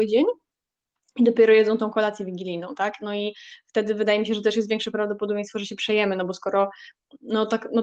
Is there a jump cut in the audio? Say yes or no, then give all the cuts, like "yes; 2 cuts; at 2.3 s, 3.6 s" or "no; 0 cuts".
no; 0 cuts